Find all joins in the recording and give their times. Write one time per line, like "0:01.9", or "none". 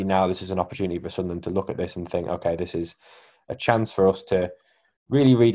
none